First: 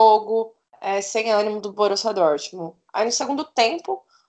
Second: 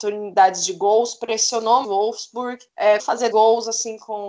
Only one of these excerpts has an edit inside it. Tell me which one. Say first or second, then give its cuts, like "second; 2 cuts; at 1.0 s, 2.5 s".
second; 3 cuts; at 1.8 s, 3.0 s, 3.3 s